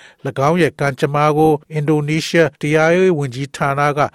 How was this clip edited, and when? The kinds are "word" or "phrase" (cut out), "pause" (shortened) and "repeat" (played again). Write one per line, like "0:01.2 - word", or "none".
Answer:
0:01.6 - pause
0:02.5 - pause